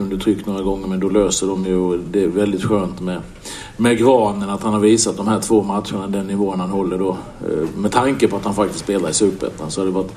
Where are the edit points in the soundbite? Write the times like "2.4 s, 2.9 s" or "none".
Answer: none